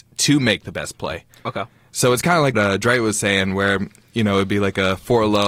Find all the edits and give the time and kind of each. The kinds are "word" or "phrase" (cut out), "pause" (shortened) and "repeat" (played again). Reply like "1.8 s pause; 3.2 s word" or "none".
2.5 s word